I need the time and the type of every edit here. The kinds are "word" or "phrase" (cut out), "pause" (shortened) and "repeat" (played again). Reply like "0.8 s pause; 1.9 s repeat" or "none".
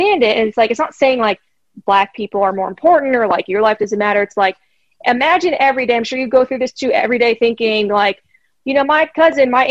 none